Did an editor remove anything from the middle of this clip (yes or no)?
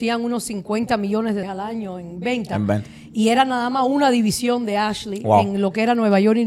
yes